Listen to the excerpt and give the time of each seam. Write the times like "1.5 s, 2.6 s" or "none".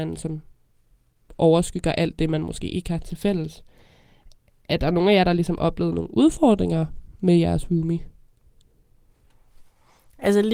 none